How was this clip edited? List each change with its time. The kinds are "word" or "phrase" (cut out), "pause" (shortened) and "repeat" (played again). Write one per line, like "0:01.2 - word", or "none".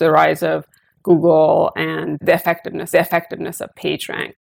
0:02.9 - repeat